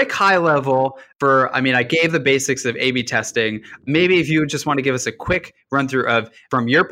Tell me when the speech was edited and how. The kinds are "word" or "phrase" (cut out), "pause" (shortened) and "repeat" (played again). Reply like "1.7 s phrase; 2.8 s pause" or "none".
none